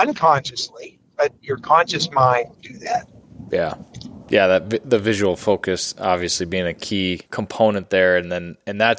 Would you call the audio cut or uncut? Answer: cut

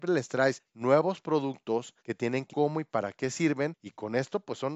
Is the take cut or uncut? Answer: cut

